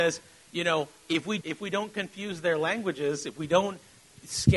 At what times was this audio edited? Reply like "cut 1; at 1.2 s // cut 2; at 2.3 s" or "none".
cut 1; at 1.0 s // cut 2; at 1.4 s